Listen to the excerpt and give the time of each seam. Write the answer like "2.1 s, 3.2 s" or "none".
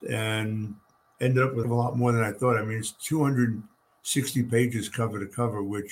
1.6 s